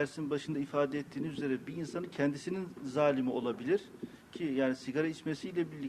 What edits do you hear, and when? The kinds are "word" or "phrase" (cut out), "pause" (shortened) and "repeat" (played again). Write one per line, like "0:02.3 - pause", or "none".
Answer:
none